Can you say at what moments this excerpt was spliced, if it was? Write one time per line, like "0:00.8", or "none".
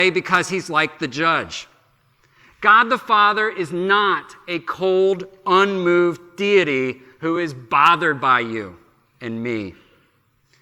none